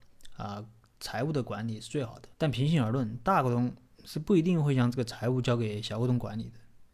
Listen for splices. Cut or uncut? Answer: cut